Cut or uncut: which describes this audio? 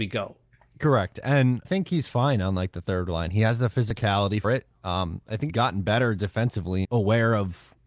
cut